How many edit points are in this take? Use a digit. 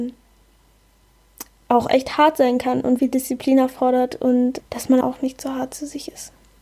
3